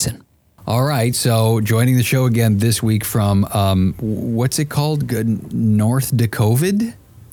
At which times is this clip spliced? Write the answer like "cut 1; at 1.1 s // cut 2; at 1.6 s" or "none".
none